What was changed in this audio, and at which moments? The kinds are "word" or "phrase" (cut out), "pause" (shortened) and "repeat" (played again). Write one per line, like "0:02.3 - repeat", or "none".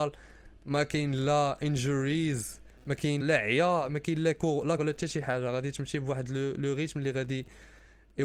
0:02.8 - pause
0:03.2 - word
0:04.8 - word

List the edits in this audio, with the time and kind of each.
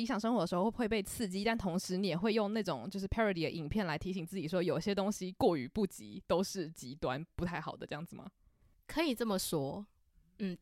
none

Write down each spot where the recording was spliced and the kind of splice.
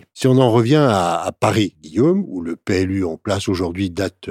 none

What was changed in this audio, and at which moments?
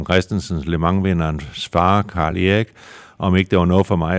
none

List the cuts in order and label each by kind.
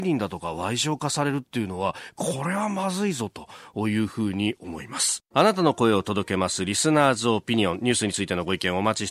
0:05.3 - pause

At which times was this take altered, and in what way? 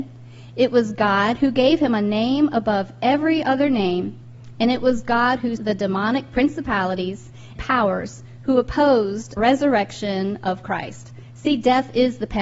0:05.6 - word
0:07.6 - word
0:09.4 - word

